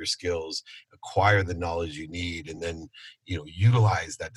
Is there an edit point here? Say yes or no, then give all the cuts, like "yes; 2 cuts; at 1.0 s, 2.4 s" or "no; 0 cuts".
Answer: no; 0 cuts